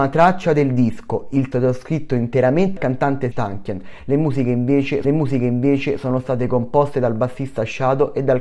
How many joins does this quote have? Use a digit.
4